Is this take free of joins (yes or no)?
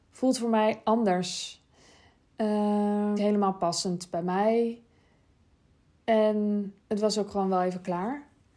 no